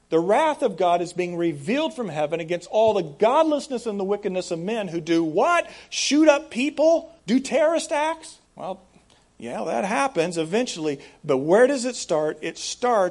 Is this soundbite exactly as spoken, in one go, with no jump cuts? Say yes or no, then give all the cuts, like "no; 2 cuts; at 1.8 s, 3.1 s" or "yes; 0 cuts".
no; 2 cuts; at 7.2 s, 8.5 s